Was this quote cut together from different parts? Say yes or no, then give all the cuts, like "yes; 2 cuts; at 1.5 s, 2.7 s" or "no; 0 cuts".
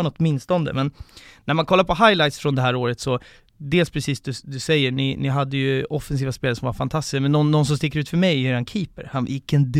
no; 0 cuts